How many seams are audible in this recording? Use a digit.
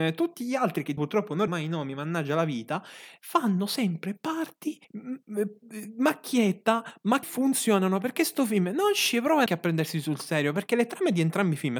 5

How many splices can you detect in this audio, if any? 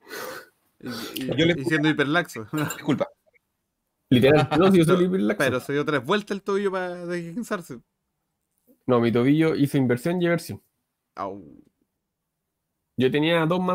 2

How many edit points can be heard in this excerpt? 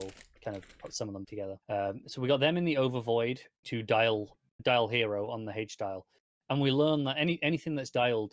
4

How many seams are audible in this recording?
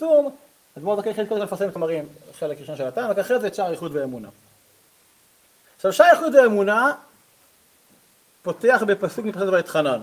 1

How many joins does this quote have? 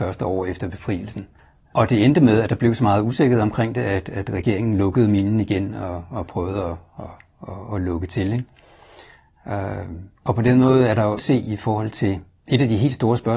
3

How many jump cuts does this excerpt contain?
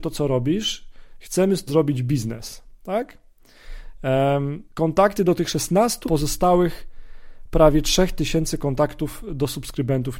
3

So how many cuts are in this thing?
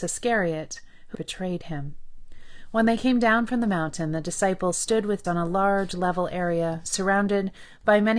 2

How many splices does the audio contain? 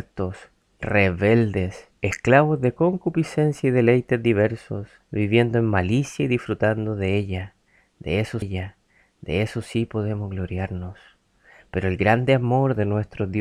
3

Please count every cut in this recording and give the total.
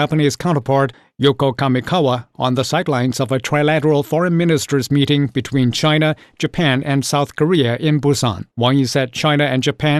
0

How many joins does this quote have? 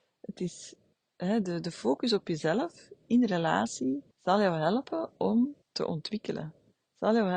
2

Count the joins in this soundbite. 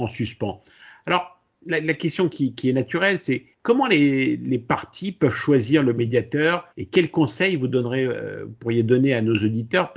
2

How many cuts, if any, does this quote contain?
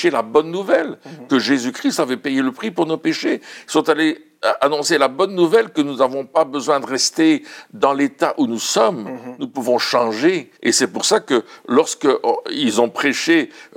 1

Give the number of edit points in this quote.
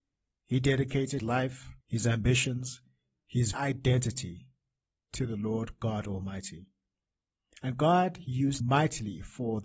4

